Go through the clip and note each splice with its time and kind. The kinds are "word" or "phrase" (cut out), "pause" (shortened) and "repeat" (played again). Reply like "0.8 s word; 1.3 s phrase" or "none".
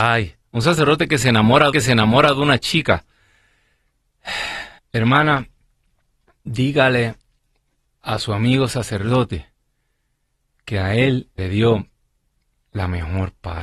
1.7 s repeat; 4.8 s pause; 11.4 s word

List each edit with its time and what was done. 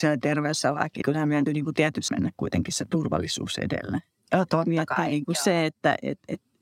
1.0 s word; 1.5 s word; 2.1 s word

